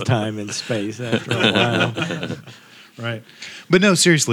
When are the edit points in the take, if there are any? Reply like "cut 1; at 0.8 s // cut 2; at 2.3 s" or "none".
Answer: none

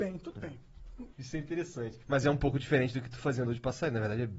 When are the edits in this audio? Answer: cut 1; at 1.1 s // cut 2; at 2.0 s // cut 3; at 3.4 s

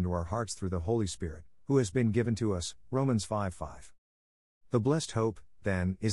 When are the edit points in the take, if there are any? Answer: none

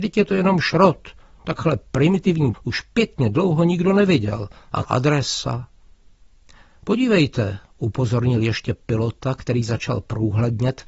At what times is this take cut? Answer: cut 1; at 2.5 s // cut 2; at 4.8 s

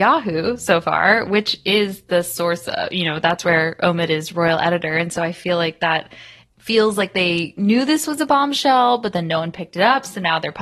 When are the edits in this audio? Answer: none

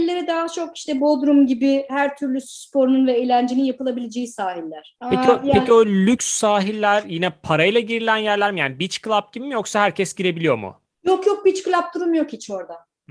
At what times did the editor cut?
none

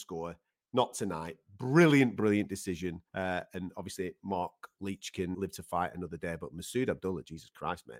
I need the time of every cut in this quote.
cut 1; at 3.1 s // cut 2; at 5.3 s

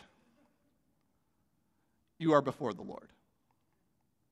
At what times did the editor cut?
none

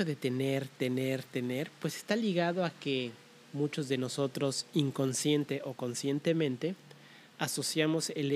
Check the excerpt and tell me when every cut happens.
cut 1; at 1.2 s // cut 2; at 3.4 s

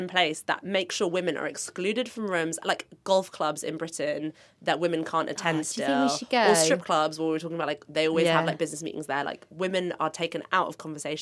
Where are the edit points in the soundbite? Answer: none

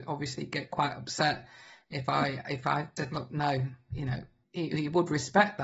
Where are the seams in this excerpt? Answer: cut 1; at 3.0 s // cut 2; at 4.4 s

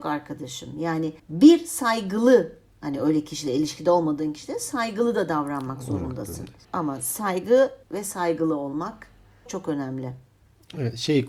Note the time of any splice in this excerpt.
cut 1; at 1.2 s // cut 2; at 6.6 s // cut 3; at 7.8 s // cut 4; at 9.5 s

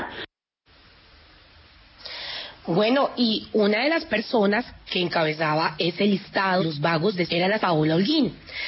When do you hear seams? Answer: cut 1; at 6.6 s // cut 2; at 7.3 s // cut 3; at 7.6 s

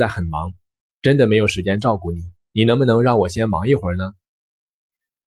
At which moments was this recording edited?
cut 1; at 2.4 s

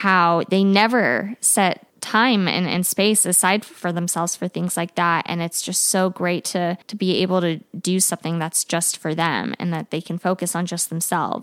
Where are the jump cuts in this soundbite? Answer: cut 1; at 1.9 s // cut 2; at 6.8 s

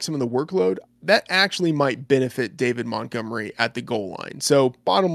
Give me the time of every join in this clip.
none

